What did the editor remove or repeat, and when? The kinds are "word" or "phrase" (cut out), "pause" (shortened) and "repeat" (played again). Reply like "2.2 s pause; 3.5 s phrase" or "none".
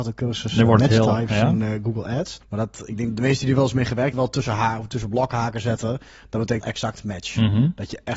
2.4 s pause; 4.1 s phrase; 6.6 s word